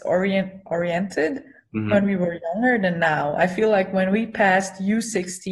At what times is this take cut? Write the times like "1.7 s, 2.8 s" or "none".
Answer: none